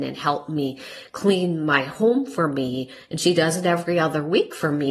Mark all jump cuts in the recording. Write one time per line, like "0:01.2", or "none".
none